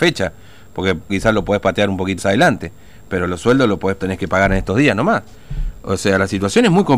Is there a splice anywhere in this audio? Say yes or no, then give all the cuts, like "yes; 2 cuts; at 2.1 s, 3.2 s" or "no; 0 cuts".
yes; 3 cuts; at 1.1 s, 2.2 s, 4.0 s